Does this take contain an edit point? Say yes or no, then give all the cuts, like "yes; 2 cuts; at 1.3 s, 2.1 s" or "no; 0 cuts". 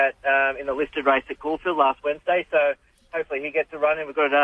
no; 0 cuts